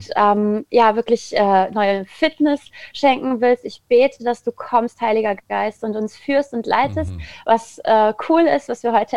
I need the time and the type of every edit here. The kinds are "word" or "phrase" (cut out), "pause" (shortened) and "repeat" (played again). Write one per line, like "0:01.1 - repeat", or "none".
none